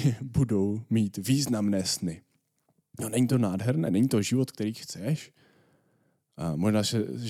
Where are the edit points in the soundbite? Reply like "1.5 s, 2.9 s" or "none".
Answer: none